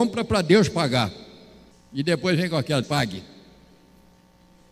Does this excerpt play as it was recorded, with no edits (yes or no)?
no